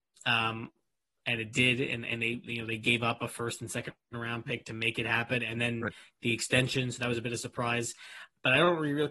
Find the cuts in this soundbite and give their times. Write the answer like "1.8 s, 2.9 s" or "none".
none